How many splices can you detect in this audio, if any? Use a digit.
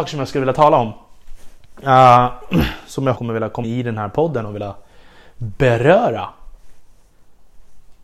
2